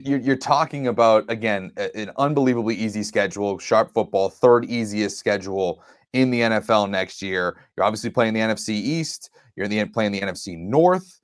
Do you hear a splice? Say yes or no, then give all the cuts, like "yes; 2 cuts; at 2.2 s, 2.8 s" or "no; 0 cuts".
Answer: no; 0 cuts